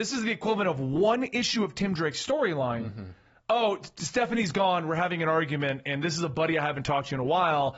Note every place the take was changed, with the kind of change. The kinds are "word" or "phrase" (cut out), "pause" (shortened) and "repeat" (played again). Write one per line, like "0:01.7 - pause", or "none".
none